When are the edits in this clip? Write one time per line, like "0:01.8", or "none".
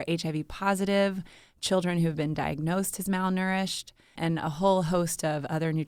0:04.2